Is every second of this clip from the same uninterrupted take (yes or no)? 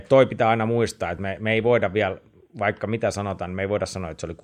yes